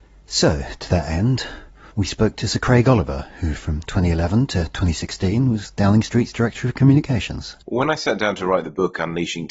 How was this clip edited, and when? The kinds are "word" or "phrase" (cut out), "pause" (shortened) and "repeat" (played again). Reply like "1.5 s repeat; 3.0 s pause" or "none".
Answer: 1.9 s pause; 7.6 s pause